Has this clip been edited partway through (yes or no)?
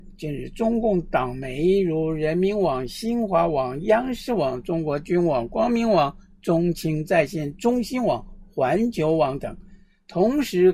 no